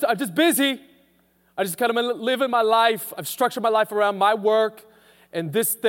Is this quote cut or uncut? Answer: uncut